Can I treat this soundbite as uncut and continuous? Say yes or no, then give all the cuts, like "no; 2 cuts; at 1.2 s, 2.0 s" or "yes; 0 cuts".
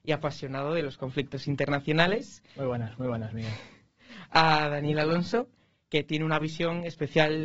yes; 0 cuts